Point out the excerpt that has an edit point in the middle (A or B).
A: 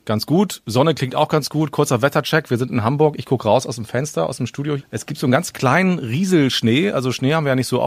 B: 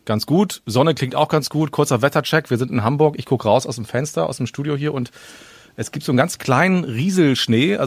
A